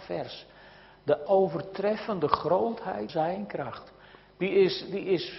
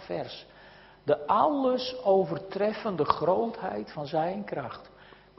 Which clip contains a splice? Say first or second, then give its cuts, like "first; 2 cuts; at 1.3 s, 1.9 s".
first; 2 cuts; at 1.3 s, 3.1 s